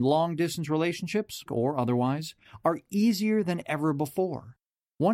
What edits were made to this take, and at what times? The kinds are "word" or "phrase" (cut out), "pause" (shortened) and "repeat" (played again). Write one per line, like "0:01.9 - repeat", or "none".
0:01.5 - word